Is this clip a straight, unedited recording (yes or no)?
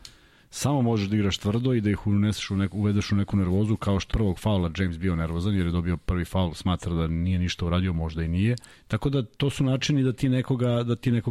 no